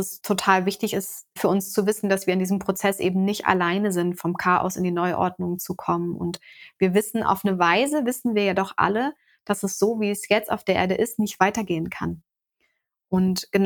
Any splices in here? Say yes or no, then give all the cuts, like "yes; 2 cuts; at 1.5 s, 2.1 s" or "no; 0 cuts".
no; 0 cuts